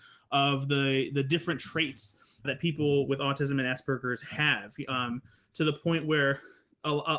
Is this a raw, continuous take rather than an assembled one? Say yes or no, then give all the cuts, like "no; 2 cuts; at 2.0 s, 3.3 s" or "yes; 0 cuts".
no; 1 cut; at 2.4 s